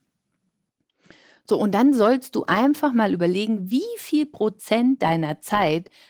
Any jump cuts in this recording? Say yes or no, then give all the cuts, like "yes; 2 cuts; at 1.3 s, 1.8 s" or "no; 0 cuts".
no; 0 cuts